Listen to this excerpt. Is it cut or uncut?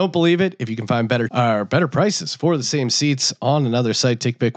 cut